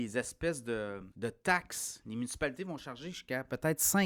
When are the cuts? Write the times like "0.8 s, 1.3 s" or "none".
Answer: 1.1 s